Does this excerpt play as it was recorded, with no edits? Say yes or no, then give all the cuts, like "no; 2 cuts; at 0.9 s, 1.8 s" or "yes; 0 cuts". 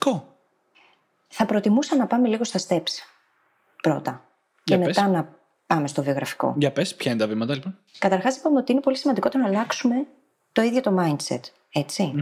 yes; 0 cuts